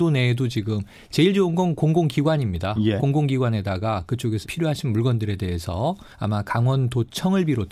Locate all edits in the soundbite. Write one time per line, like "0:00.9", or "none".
0:04.4
0:06.1